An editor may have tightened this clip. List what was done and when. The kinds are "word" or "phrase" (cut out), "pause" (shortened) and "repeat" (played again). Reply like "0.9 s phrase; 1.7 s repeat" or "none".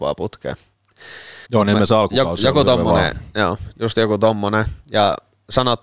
1.4 s pause